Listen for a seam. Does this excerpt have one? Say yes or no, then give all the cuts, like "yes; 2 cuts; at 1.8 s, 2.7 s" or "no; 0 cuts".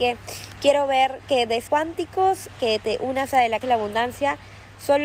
yes; 2 cuts; at 1.7 s, 3.6 s